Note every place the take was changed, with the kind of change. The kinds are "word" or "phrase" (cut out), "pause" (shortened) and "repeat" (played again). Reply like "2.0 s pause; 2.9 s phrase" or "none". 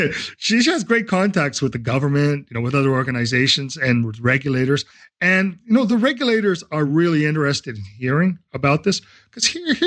none